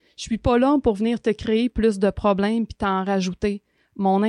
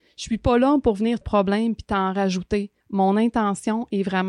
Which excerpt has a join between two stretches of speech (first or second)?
second